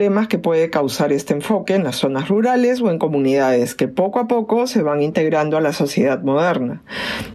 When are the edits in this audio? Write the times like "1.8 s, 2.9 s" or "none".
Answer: none